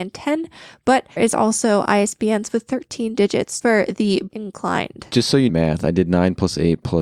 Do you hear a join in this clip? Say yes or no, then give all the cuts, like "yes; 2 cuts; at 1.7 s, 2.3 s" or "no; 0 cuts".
yes; 4 cuts; at 1.2 s, 3.6 s, 4.3 s, 5.5 s